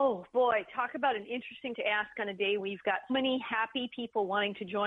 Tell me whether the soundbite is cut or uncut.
cut